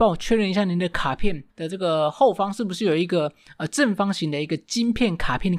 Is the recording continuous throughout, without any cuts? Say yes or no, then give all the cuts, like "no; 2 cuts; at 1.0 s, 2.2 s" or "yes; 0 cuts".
no; 1 cut; at 1.5 s